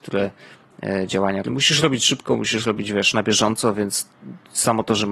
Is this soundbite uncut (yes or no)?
no